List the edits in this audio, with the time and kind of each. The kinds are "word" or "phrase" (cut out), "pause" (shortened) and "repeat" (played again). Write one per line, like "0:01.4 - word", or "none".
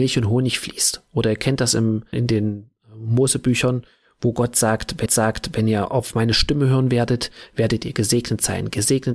0:02.1 - word
0:05.1 - repeat

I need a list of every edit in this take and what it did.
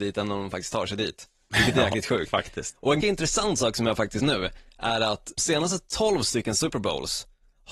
0:03.0 - word
0:04.2 - word
0:05.4 - word

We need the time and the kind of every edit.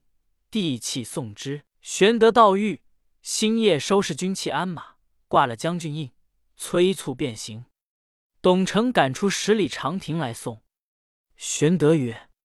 0:01.7 - pause

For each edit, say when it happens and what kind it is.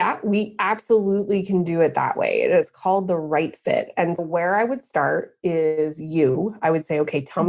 0:04.2 - word

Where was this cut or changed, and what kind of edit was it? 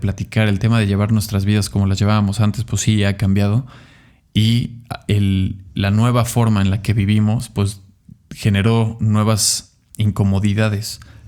none

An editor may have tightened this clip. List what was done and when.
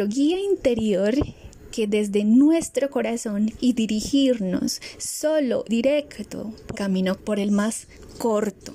0:03.6 - phrase
0:05.7 - word
0:06.7 - word
0:07.2 - word

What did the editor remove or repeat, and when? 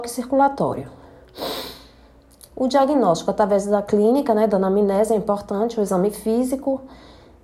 none

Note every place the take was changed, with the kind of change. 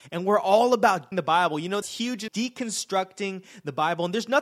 0:01.1 - word
0:01.8 - word
0:02.3 - phrase

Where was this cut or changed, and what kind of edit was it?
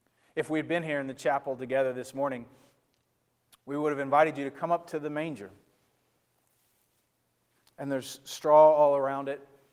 none

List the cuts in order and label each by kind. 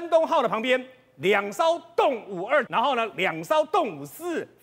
0:02.7 - word

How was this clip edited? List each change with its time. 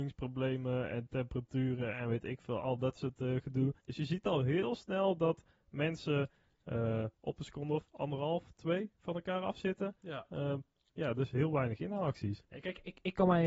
none

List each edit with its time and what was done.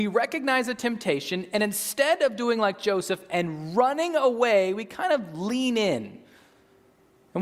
none

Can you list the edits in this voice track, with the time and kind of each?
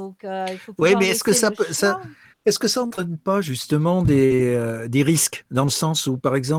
0:02.3 - pause

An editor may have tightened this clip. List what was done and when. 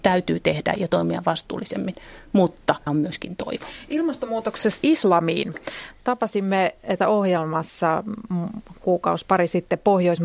0:02.9 - word
0:04.8 - word
0:07.0 - word

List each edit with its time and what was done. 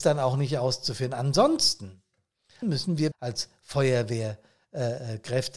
0:02.6 - word
0:03.1 - word

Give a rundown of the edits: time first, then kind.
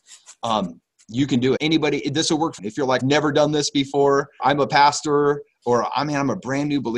0:01.6 - word
0:02.6 - word
0:03.0 - word
0:04.4 - word

